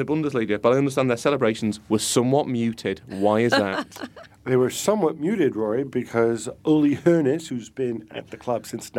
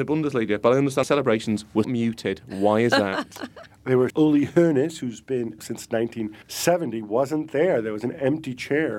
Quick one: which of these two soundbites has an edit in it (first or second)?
second